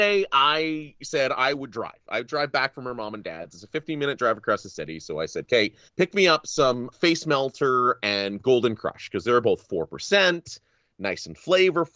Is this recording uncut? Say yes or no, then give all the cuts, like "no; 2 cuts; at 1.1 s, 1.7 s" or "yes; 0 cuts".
no; 2 cuts; at 5.9 s, 6.9 s